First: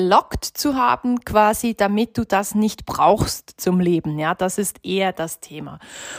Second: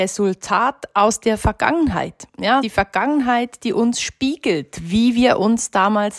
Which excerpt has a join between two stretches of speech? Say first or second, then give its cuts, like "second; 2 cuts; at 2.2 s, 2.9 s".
second; 1 cut; at 2.6 s